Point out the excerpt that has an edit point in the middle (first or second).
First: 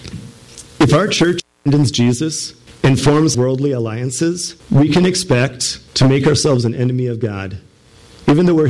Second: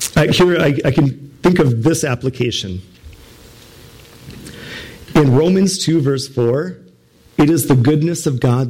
first